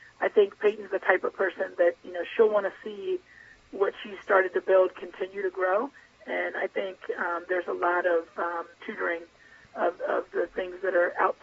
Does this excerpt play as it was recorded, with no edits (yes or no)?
no